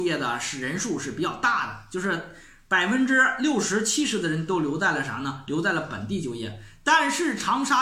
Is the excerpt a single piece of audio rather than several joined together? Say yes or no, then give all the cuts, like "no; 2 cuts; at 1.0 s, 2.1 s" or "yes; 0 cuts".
yes; 0 cuts